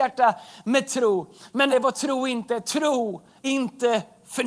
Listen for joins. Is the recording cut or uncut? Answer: cut